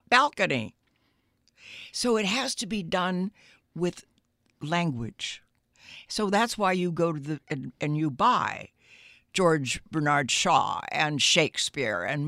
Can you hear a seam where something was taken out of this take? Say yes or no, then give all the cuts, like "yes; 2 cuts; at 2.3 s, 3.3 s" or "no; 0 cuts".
no; 0 cuts